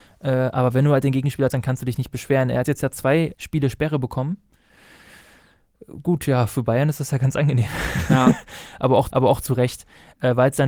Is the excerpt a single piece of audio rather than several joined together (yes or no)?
no